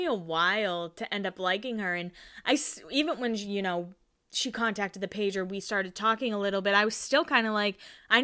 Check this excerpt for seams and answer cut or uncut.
uncut